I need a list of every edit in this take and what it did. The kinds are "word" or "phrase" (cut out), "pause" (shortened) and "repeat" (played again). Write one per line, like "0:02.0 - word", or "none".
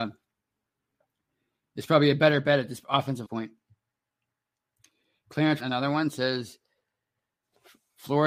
0:03.3 - phrase
0:05.6 - word